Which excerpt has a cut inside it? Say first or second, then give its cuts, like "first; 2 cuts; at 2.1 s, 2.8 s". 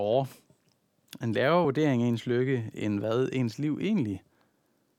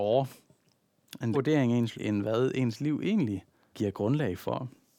second; 3 cuts; at 1.3 s, 1.9 s, 3.7 s